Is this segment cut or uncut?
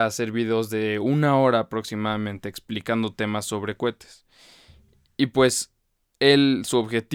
uncut